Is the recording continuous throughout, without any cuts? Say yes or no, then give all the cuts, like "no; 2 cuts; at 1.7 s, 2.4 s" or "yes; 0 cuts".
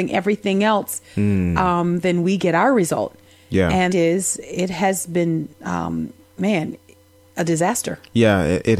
no; 1 cut; at 3.9 s